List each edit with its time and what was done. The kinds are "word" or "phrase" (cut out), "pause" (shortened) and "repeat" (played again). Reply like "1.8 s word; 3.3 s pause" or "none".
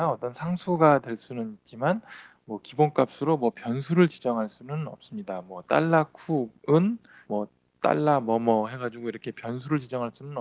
7.2 s word